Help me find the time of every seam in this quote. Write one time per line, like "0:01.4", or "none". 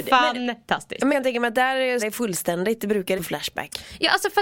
0:01.1
0:02.0
0:03.2